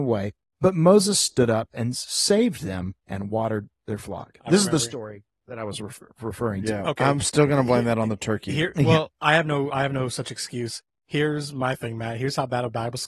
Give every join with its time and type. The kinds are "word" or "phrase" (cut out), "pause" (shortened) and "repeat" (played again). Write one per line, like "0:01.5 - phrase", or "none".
0:03.0 - pause